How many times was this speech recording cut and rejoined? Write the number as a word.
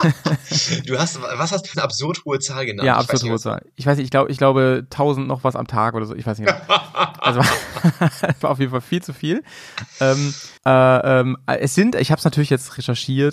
three